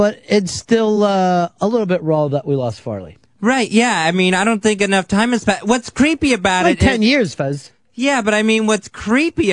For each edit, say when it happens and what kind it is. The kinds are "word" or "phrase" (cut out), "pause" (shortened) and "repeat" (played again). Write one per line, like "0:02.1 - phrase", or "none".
none